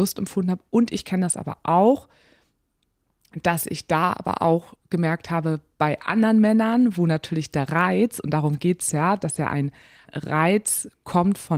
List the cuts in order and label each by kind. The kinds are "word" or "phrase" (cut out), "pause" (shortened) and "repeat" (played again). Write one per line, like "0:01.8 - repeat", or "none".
0:10.1 - word